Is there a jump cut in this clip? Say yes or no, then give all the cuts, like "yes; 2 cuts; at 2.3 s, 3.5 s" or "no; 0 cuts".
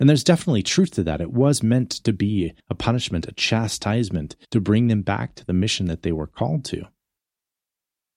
yes; 2 cuts; at 2.6 s, 4.4 s